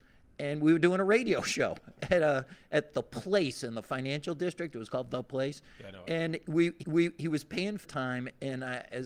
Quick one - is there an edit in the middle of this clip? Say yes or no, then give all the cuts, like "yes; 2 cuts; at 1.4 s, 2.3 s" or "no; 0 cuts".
yes; 2 cuts; at 6.8 s, 7.8 s